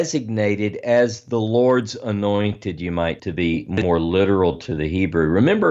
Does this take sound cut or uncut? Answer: cut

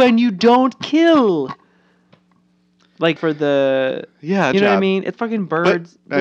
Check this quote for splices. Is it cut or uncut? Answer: cut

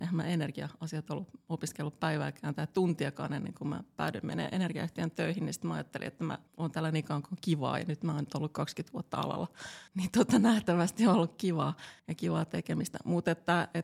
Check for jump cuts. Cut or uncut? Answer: cut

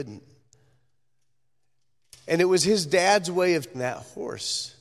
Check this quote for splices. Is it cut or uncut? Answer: cut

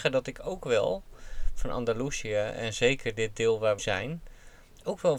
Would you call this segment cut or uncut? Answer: cut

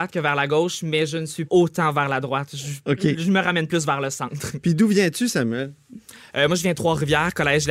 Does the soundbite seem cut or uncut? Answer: cut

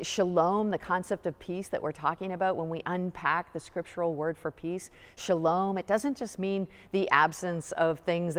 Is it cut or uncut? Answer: uncut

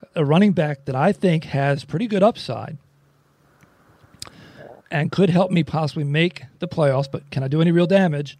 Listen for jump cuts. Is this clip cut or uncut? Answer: cut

